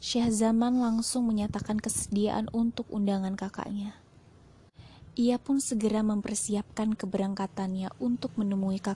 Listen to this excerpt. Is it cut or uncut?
uncut